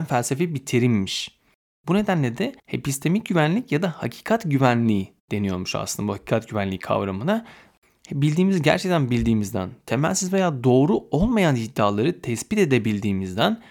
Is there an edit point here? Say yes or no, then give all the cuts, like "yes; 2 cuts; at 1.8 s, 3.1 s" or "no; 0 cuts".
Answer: yes; 1 cut; at 2.6 s